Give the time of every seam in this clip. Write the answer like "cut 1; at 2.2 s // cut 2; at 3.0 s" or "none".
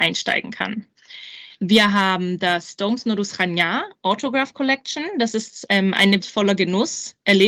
cut 1; at 6.2 s